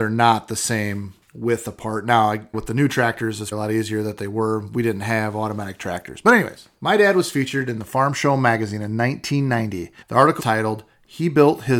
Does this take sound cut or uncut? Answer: cut